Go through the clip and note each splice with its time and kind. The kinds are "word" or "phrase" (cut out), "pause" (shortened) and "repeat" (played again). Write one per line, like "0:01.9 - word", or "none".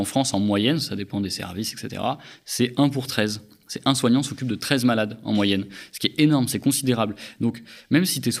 none